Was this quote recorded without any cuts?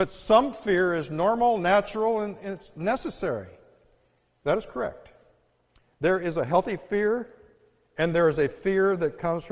yes; 0 cuts

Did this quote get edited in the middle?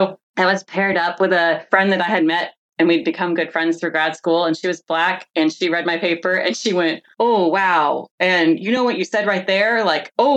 no; 0 cuts

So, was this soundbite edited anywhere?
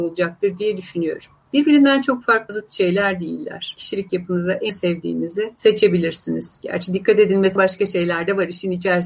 yes; 3 cuts; at 2.5 s, 4.7 s, 7.6 s

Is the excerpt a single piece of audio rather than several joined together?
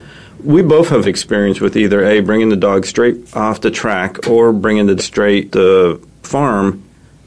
no; 4 cuts; at 1.0 s, 5.0 s, 5.5 s, 6.2 s

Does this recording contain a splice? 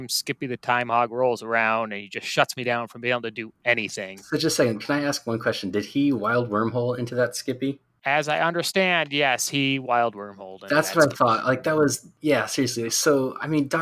no; 0 cuts

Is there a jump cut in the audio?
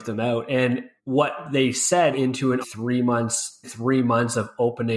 yes; 4 cuts; at 1.0 s, 2.1 s, 2.6 s, 3.6 s

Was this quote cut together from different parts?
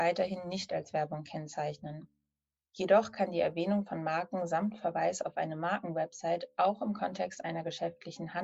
no; 0 cuts

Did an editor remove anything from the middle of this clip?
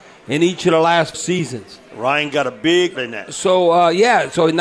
yes; 2 cuts; at 1.1 s, 3.0 s

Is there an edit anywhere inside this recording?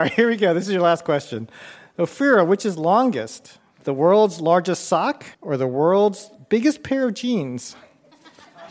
yes; 1 cut; at 5.3 s

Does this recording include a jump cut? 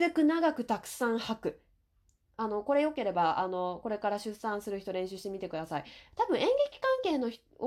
no; 0 cuts

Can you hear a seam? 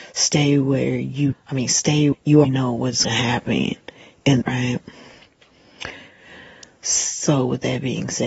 yes; 5 cuts; at 1.3 s, 2.1 s, 2.4 s, 3.0 s, 4.4 s

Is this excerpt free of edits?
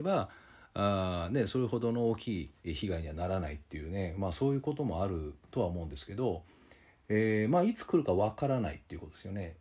yes; 0 cuts

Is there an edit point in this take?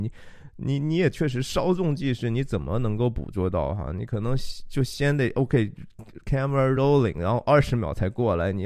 no; 0 cuts

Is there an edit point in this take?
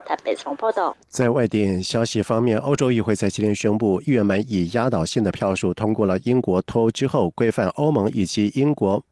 yes; 1 cut; at 1.0 s

